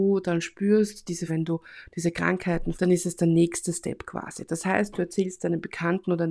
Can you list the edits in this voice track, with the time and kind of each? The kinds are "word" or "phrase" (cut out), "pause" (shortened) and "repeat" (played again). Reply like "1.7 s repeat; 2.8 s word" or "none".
1.3 s word; 2.7 s word